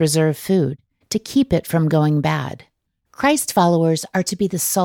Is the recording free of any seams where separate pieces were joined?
no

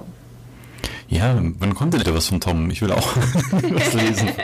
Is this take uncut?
no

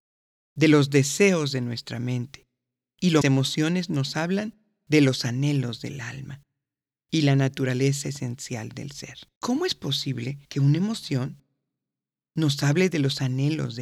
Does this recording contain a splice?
yes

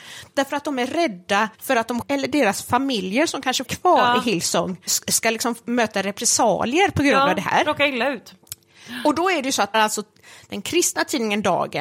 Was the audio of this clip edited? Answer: yes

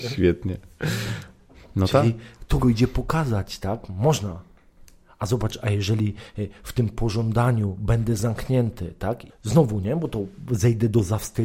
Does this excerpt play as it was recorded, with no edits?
no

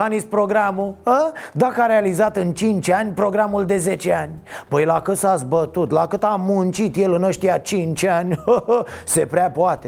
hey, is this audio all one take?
yes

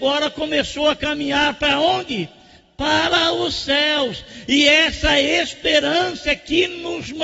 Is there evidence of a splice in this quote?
no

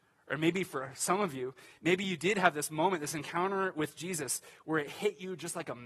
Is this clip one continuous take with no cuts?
yes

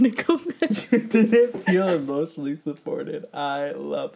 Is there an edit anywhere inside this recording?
no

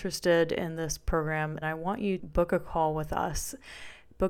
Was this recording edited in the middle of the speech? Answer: yes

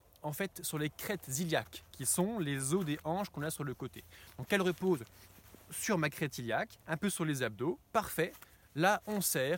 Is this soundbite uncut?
no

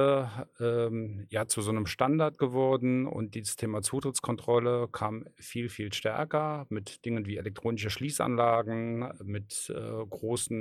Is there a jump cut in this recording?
no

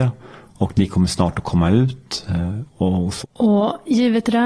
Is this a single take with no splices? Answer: no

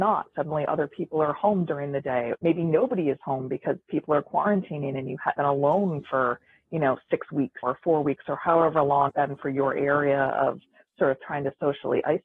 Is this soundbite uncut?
no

